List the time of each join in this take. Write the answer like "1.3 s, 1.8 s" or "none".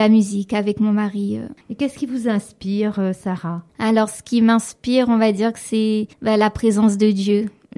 3.7 s, 6.1 s